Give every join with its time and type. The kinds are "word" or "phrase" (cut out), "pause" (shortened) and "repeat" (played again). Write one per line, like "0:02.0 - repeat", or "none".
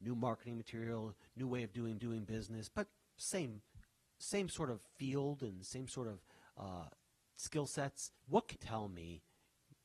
0:02.0 - repeat
0:08.2 - pause
0:08.6 - phrase